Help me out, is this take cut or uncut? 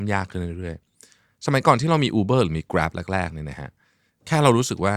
uncut